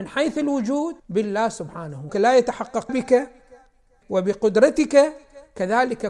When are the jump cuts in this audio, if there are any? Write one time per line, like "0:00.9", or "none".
0:01.0
0:02.1
0:02.9
0:04.0